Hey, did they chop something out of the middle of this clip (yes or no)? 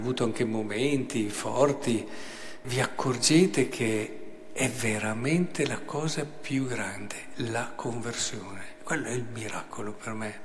yes